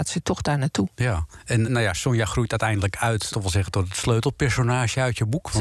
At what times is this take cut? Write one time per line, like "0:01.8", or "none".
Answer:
0:00.9
0:01.6
0:03.3